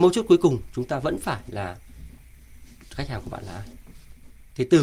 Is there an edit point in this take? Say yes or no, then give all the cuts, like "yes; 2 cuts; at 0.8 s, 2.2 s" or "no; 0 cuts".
no; 0 cuts